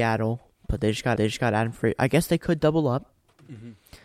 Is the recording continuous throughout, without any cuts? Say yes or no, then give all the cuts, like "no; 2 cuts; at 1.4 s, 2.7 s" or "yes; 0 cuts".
no; 1 cut; at 1.2 s